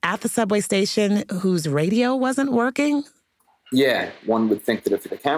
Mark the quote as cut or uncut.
uncut